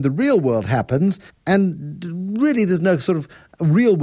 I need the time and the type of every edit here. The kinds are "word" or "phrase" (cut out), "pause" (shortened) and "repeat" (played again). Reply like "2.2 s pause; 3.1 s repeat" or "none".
1.3 s pause